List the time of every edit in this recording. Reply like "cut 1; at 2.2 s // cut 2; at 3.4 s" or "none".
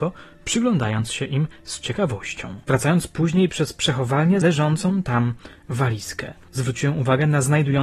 cut 1; at 2.6 s // cut 2; at 4.4 s // cut 3; at 6.5 s